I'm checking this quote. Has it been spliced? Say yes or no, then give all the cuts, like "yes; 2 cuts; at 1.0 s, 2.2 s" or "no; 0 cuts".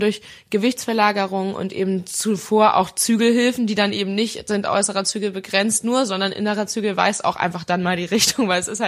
no; 0 cuts